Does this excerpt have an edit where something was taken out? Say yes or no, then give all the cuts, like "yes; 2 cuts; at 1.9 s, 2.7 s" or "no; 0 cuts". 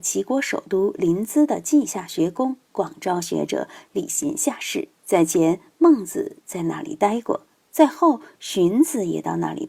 yes; 1 cut; at 4.9 s